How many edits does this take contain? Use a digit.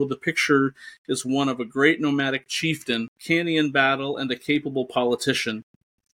1